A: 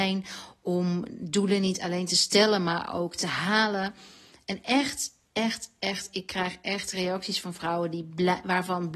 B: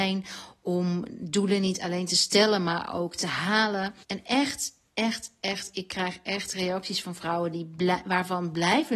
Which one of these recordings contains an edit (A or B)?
B